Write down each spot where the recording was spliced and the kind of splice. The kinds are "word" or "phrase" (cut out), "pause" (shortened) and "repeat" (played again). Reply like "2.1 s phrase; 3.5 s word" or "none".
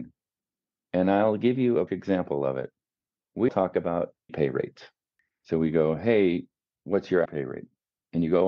1.9 s word; 3.5 s word; 4.3 s word; 7.3 s word